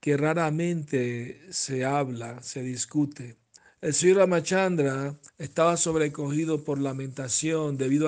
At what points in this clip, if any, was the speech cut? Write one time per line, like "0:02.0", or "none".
0:03.6
0:05.3